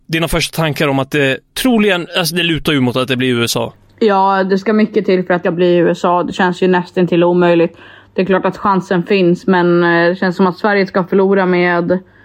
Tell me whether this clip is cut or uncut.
cut